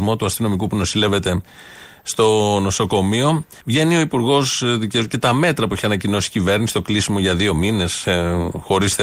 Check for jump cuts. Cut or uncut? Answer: cut